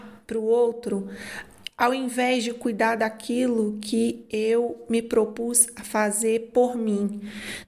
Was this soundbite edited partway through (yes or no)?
no